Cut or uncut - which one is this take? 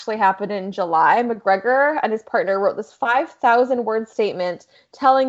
uncut